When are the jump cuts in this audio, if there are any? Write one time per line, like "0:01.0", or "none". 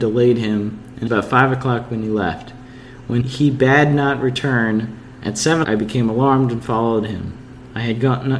0:01.1
0:03.2
0:05.6